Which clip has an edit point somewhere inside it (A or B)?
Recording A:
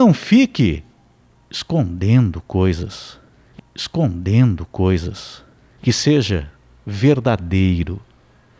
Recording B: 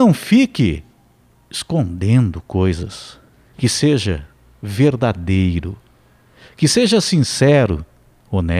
A